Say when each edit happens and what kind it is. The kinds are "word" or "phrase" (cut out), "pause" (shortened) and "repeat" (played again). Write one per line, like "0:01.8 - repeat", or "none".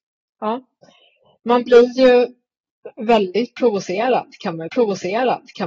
0:04.7 - repeat